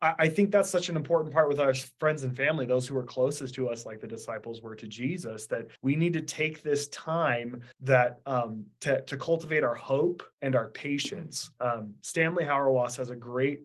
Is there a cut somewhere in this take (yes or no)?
yes